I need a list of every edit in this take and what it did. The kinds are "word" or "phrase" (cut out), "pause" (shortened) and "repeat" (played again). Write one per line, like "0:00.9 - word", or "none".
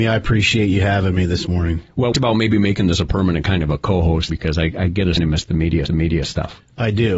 0:02.1 - phrase
0:04.3 - word
0:05.2 - phrase
0:05.9 - repeat